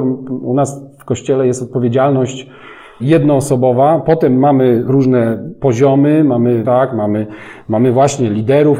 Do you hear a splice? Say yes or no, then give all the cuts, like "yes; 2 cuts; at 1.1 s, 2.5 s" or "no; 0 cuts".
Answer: yes; 2 cuts; at 3.0 s, 6.6 s